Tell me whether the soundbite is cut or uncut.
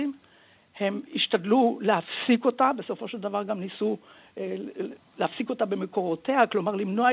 uncut